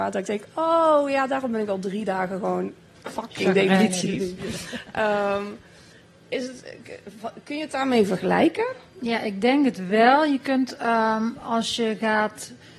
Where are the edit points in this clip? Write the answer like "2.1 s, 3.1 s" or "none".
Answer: none